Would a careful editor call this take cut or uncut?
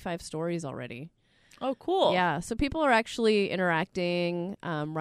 uncut